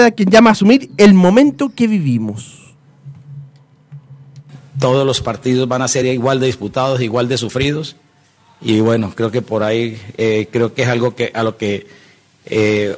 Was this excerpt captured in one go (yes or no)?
yes